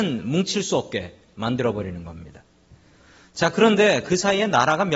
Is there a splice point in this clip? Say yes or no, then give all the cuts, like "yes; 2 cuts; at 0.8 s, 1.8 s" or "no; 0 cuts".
no; 0 cuts